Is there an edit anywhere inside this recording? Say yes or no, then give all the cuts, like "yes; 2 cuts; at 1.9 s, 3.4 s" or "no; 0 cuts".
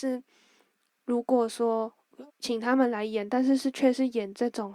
yes; 1 cut; at 2.3 s